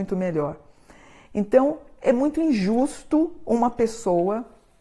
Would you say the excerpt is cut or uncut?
uncut